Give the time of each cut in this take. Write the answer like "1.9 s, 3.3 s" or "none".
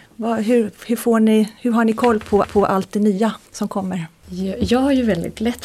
1.6 s, 2.4 s, 3.5 s